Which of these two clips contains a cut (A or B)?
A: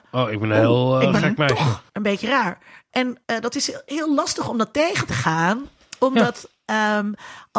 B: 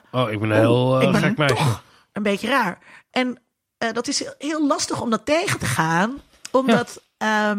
A